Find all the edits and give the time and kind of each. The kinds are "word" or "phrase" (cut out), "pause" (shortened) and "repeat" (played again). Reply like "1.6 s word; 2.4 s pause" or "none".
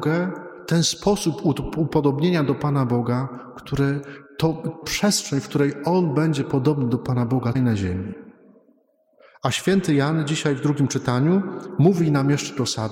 4.8 s word; 7.5 s word